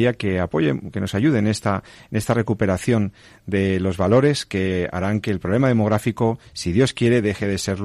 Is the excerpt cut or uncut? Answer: uncut